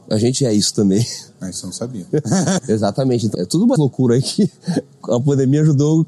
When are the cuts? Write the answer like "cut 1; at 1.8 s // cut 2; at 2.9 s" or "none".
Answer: cut 1; at 2.6 s // cut 2; at 3.3 s // cut 3; at 3.8 s